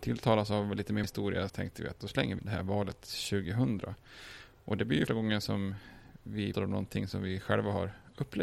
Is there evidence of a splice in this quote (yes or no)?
yes